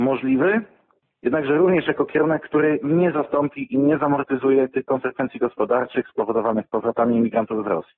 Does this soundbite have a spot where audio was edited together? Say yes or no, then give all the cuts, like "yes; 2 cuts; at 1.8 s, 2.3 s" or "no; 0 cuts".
no; 0 cuts